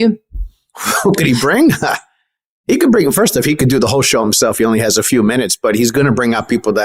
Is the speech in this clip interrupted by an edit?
no; 0 cuts

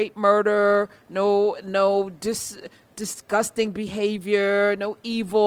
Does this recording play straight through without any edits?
yes; 0 cuts

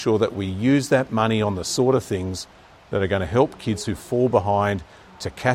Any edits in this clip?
no; 0 cuts

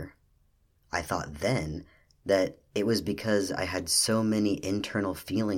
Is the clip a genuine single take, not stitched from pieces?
yes; 0 cuts

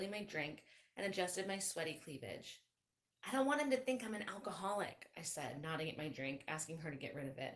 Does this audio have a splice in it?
no; 0 cuts

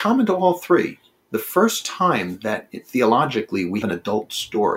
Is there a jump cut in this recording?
yes; 1 cut; at 3.8 s

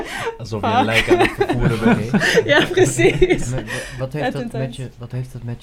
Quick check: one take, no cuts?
yes; 0 cuts

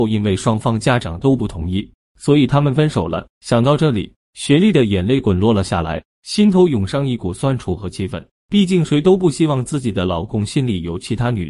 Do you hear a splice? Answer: yes; 1 cut; at 3.3 s

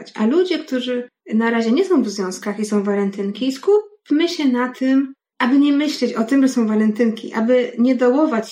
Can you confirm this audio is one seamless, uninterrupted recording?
no; 1 cut; at 1.2 s

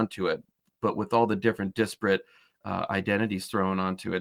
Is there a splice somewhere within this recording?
no; 0 cuts

